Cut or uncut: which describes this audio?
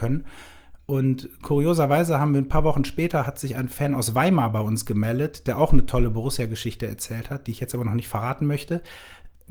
uncut